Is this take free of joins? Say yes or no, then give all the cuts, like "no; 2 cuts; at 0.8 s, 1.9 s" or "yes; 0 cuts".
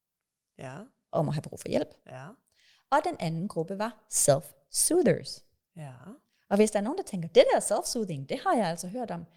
yes; 0 cuts